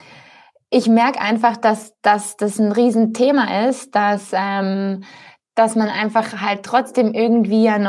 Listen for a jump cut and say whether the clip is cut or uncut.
uncut